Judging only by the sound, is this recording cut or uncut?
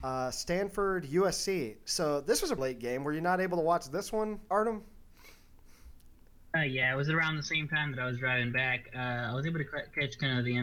cut